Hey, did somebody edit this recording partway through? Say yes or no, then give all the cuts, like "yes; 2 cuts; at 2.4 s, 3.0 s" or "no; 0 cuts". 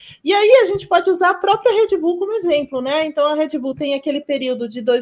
no; 0 cuts